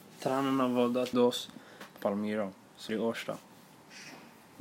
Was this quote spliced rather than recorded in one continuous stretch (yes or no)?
yes